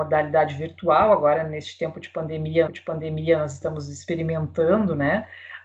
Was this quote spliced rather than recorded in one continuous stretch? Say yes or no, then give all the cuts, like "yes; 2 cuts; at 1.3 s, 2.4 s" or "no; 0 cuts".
yes; 1 cut; at 2.7 s